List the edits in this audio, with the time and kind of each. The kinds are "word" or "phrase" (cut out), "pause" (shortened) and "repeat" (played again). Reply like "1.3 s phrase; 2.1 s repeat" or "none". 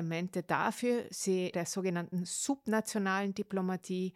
1.5 s phrase